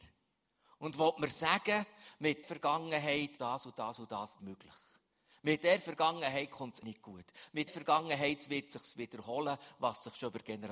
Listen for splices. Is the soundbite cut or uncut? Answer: cut